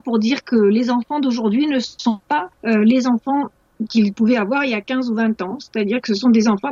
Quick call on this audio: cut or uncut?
cut